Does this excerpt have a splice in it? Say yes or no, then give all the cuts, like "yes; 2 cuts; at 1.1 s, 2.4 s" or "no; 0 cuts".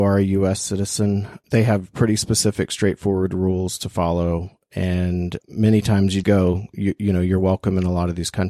yes; 3 cuts; at 1.4 s, 5.4 s, 6.2 s